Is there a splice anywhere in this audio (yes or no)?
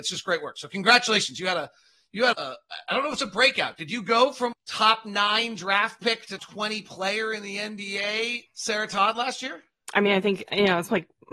yes